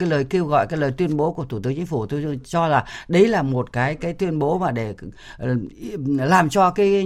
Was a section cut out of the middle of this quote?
no; 0 cuts

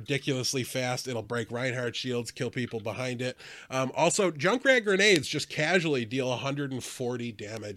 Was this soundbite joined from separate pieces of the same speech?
no; 0 cuts

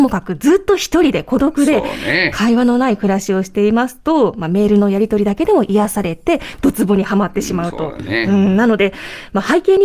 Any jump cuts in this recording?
no; 0 cuts

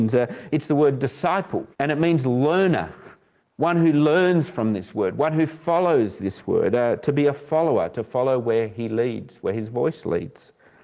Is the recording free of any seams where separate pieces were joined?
no; 2 cuts; at 1.7 s, 3.4 s

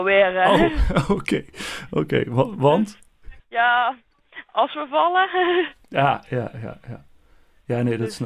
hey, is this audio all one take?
no; 1 cut; at 3.4 s

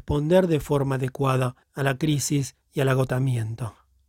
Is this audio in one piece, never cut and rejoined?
no; 2 cuts; at 1.6 s, 2.6 s

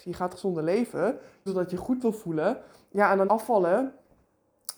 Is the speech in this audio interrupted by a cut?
yes; 2 cuts; at 1.5 s, 3.3 s

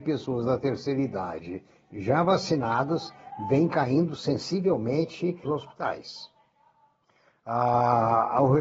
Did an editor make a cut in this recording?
yes; 1 cut; at 5.4 s

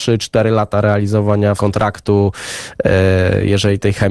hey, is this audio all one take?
no; 1 cut; at 1.6 s

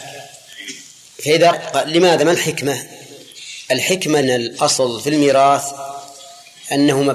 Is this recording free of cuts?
no; 2 cuts; at 1.5 s, 4.2 s

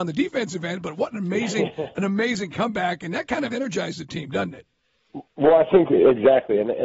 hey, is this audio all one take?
yes; 0 cuts

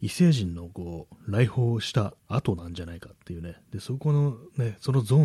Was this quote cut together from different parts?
yes; 1 cut; at 2.2 s

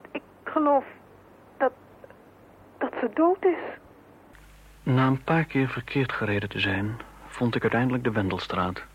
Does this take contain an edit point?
no; 0 cuts

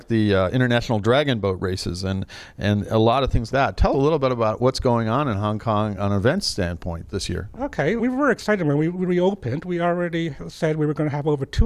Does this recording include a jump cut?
yes; 3 cuts; at 3.5 s, 3.9 s, 8.0 s

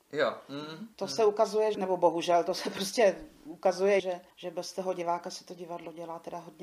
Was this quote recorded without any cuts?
no; 4 cuts; at 0.9 s, 1.7 s, 4.0 s, 4.3 s

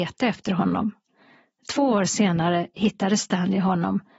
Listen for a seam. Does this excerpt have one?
no; 0 cuts

